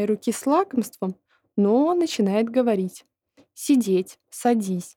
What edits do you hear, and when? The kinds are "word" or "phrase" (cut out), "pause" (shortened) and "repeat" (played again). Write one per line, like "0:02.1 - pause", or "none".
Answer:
none